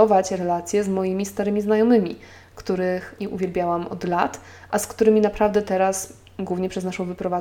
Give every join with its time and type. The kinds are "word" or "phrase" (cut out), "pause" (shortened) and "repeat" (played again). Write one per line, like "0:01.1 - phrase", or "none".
0:03.2 - word